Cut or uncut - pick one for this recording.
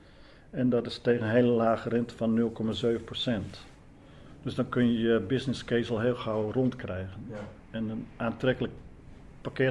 uncut